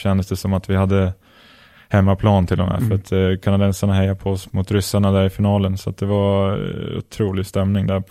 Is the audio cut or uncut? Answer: cut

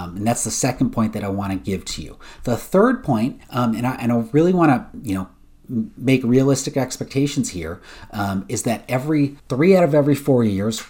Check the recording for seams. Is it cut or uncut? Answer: cut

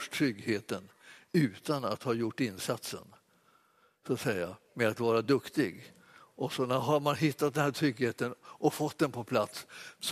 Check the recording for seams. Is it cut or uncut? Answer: uncut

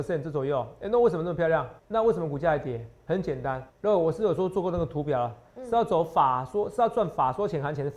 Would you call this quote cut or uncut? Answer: cut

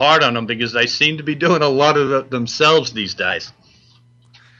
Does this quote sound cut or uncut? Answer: uncut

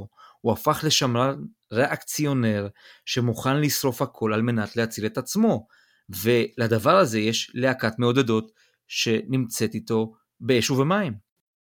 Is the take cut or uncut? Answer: uncut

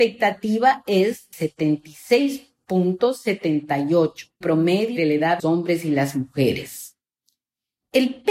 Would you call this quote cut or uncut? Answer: cut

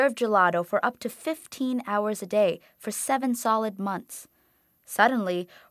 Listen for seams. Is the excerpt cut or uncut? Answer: uncut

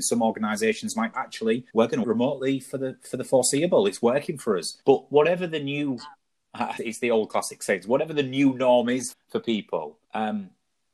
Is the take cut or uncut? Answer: cut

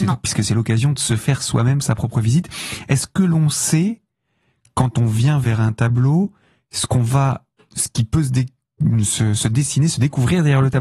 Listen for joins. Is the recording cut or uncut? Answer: uncut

